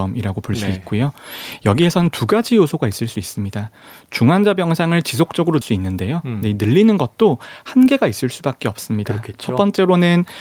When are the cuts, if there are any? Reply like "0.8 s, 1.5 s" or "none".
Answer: 5.6 s